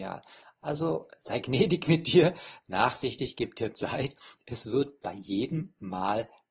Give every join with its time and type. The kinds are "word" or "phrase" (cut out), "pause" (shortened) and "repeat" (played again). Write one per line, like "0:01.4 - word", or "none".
none